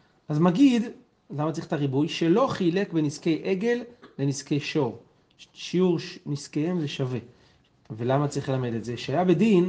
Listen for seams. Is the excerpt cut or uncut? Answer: uncut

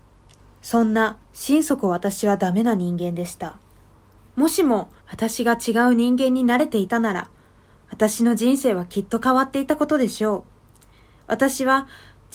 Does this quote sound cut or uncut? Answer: cut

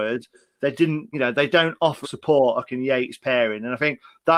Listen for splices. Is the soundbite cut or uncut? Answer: cut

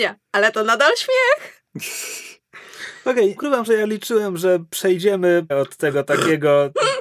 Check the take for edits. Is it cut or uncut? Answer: cut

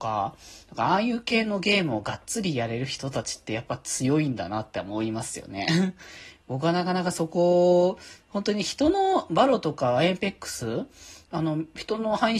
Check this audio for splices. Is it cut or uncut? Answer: uncut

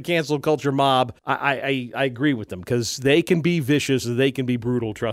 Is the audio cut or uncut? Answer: cut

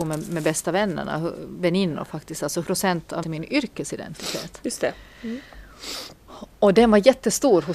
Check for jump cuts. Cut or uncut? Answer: cut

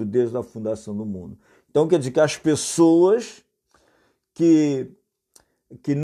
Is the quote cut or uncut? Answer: uncut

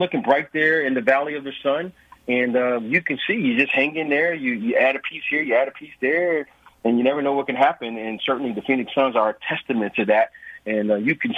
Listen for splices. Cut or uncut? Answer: uncut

